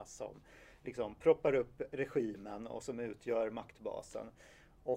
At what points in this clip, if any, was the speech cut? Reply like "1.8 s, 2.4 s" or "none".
none